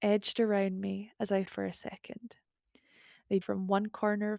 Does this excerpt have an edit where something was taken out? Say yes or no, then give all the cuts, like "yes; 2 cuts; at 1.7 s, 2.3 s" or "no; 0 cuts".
yes; 2 cuts; at 1.5 s, 3.4 s